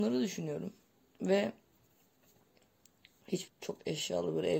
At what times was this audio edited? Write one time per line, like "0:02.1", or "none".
0:03.5